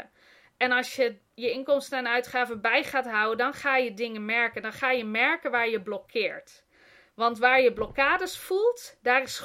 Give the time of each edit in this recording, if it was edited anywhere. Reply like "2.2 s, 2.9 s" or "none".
none